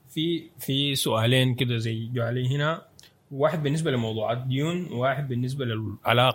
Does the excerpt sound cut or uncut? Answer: uncut